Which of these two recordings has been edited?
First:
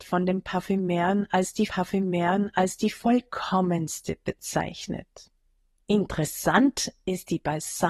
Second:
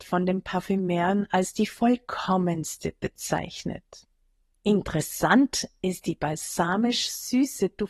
first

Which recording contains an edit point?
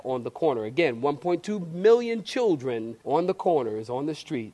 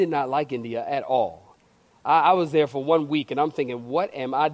first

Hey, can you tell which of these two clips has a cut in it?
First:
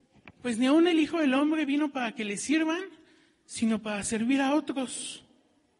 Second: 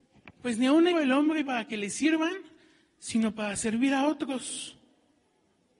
second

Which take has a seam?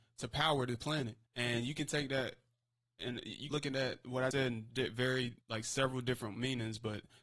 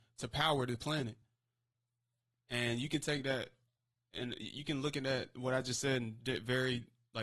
first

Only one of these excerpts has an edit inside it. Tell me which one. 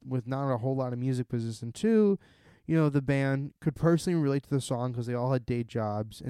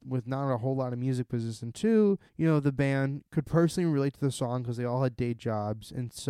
second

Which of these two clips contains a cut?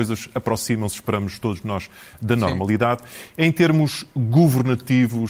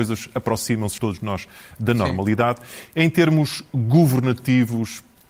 second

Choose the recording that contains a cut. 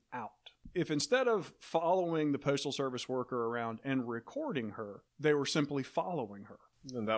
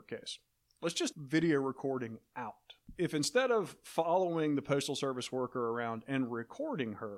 second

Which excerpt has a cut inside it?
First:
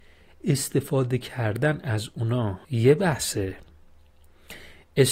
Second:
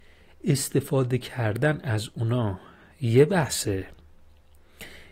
first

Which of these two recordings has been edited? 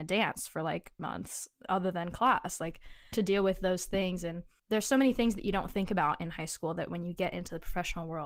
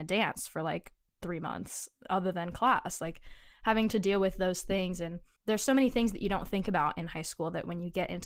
first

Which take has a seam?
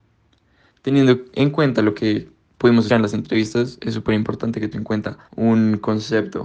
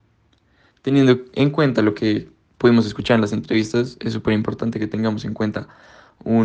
first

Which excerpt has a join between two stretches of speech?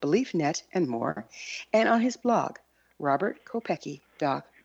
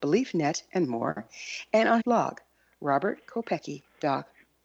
second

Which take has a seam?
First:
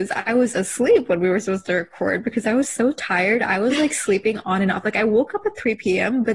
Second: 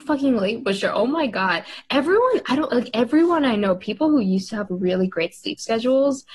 second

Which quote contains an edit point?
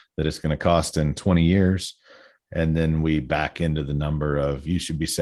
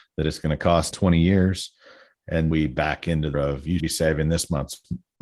second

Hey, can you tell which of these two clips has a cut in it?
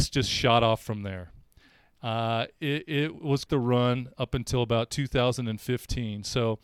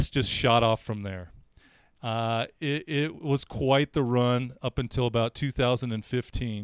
first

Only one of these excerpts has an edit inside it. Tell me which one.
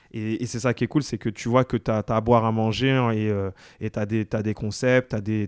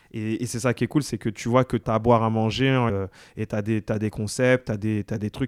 second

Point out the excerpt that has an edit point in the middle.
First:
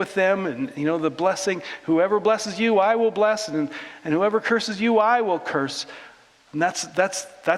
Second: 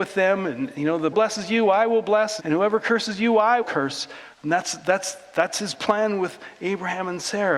second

